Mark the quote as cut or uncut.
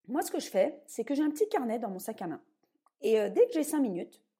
uncut